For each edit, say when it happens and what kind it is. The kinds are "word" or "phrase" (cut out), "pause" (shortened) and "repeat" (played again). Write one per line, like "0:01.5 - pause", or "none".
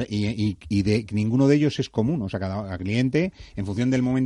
0:02.8 - word